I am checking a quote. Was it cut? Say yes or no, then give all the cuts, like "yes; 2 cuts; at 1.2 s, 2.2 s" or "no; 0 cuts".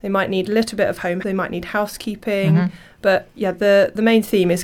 yes; 1 cut; at 1.2 s